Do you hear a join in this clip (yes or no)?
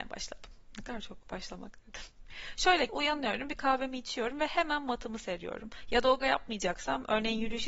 yes